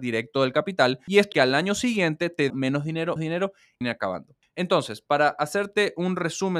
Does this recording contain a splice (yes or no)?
yes